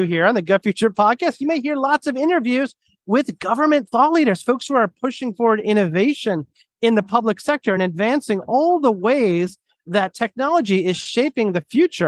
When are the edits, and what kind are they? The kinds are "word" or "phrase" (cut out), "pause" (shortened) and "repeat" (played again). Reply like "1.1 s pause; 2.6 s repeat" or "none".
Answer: none